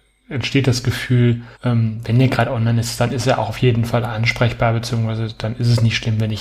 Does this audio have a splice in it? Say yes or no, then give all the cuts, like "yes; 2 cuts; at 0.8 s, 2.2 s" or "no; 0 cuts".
yes; 1 cut; at 1.5 s